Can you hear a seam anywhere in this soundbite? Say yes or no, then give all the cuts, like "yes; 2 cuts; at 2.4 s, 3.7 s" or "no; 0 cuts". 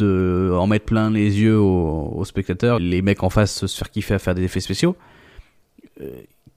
yes; 1 cut; at 2.8 s